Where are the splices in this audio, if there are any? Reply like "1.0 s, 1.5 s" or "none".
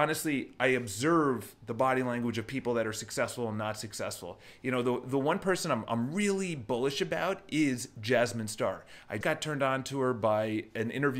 9.2 s